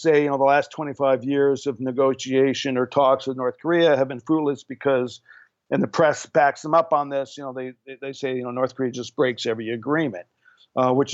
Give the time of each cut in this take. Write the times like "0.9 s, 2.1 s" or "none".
none